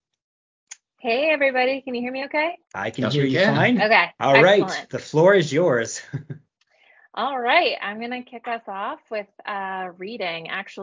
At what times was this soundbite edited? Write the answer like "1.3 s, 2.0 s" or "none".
2.6 s, 4.2 s, 6.5 s